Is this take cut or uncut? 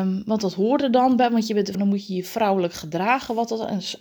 cut